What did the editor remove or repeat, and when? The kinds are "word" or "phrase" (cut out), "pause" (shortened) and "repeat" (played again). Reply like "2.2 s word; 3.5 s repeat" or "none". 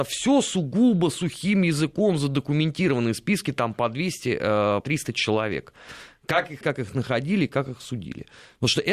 4.8 s word; 6.6 s word